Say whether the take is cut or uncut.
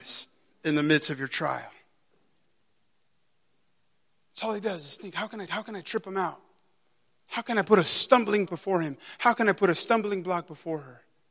cut